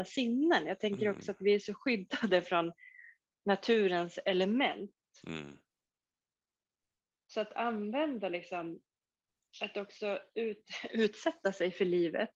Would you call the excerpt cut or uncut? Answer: uncut